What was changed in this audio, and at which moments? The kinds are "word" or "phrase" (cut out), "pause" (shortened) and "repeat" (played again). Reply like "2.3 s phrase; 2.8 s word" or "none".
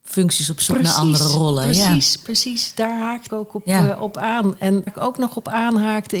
3.3 s word; 4.9 s word